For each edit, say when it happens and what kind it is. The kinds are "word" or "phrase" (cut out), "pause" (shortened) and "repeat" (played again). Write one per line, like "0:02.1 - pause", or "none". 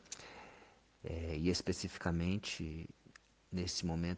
none